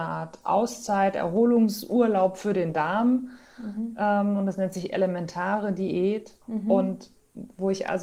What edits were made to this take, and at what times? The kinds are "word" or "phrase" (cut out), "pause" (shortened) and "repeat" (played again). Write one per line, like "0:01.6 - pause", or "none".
0:06.4 - pause